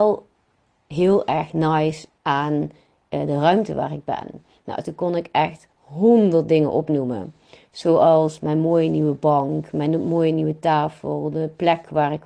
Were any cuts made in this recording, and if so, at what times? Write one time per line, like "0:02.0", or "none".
0:05.7